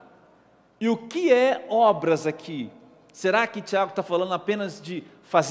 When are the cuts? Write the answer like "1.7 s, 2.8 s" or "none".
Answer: none